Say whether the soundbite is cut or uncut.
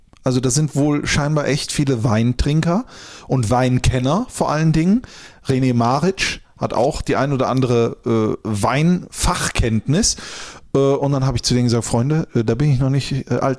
uncut